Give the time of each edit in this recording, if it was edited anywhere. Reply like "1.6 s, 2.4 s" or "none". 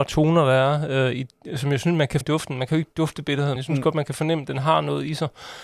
2.2 s, 3.6 s